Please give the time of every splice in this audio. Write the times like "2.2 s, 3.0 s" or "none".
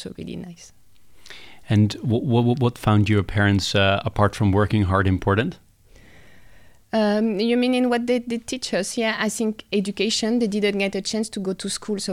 none